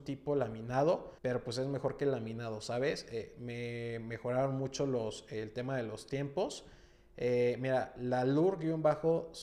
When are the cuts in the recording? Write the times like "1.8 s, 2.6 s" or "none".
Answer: 1.2 s